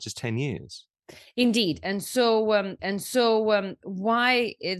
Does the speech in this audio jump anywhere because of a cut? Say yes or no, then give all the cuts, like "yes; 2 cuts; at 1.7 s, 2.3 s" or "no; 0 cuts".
yes; 1 cut; at 2.8 s